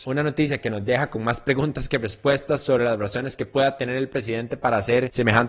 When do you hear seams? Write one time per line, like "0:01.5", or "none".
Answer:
none